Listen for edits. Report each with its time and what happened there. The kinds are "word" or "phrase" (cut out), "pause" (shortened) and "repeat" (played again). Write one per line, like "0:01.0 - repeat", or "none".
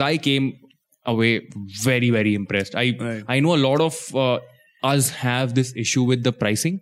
none